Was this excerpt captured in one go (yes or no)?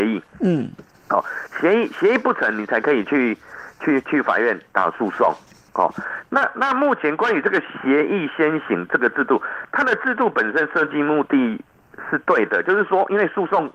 yes